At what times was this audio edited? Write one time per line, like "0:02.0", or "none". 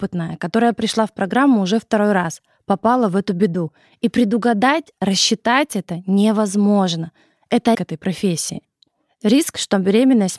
0:07.7